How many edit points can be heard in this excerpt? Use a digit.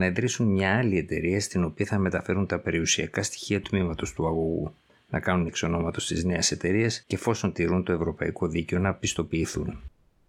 4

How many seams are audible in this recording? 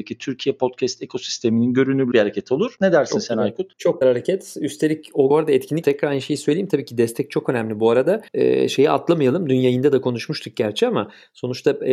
5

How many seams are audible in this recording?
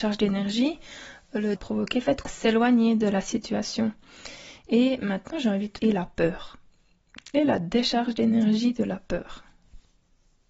4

